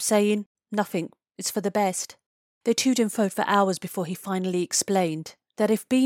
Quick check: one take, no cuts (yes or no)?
yes